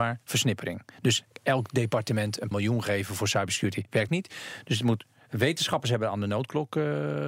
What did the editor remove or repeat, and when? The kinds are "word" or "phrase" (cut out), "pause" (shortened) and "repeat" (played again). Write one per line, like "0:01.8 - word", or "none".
0:02.5 - word
0:04.1 - word